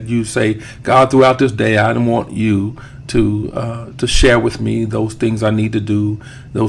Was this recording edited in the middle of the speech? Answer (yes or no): no